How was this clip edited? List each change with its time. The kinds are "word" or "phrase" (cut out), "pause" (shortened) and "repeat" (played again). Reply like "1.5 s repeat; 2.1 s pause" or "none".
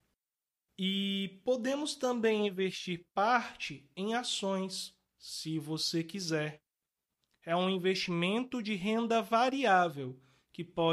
none